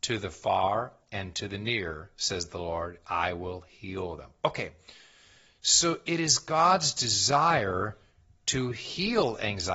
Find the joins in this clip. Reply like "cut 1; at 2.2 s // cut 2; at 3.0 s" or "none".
none